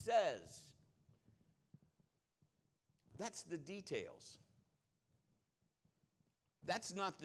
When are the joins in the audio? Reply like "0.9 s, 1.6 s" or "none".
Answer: none